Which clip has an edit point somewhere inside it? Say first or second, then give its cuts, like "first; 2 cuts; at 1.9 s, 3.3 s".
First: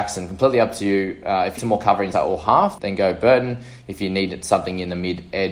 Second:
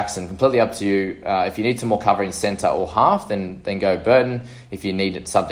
first; 3 cuts; at 1.6 s, 2.1 s, 2.8 s